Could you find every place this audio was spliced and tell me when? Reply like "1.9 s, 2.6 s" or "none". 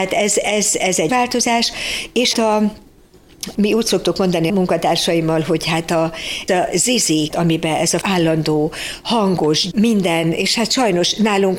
1.1 s, 2.3 s, 3.5 s, 4.5 s, 6.5 s, 7.3 s, 8.0 s, 9.7 s